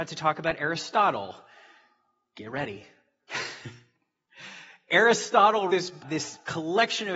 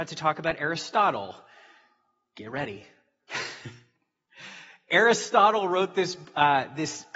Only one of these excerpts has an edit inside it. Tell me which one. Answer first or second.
first